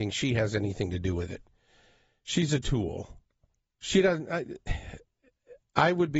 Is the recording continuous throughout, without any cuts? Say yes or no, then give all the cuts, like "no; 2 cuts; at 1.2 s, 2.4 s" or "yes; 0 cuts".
yes; 0 cuts